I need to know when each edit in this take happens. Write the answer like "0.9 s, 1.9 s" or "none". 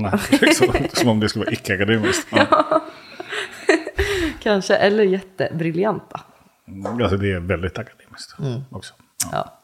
none

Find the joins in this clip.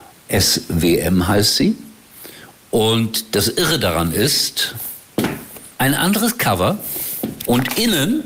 5.7 s

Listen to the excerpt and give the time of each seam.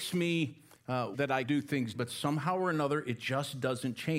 1.1 s, 1.4 s, 1.9 s

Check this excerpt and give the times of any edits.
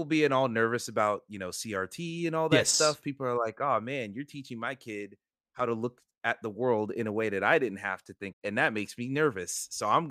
8.3 s

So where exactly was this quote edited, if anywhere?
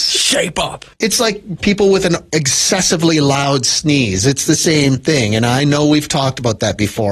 0.9 s

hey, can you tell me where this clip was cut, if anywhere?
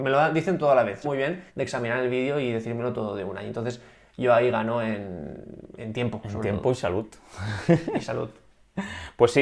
1.0 s, 1.5 s

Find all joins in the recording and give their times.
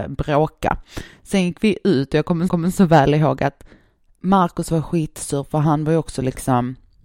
2.5 s

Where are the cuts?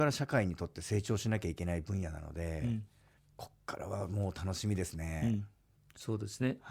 3.2 s, 5.7 s

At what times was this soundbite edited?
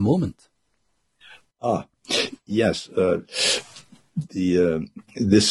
none

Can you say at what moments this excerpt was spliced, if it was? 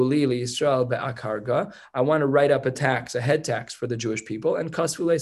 none

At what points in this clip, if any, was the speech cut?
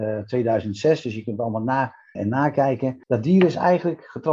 2.2 s, 3.0 s

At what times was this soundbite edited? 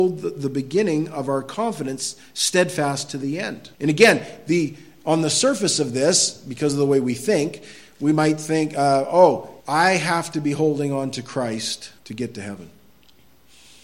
3.7 s, 9.6 s, 12.0 s

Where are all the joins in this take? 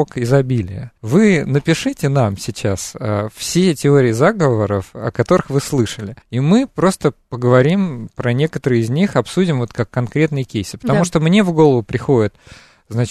1.0 s, 6.2 s

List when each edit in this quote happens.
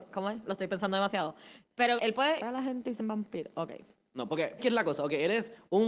2.0 s, 2.4 s, 3.0 s, 4.6 s

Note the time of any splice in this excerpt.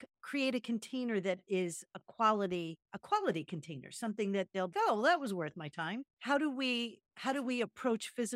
2.8 s, 4.7 s

